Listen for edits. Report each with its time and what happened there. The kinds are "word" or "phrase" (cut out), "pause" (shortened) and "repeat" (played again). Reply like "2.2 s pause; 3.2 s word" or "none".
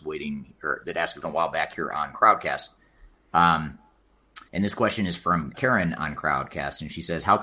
1.2 s word; 4.5 s pause; 5.5 s word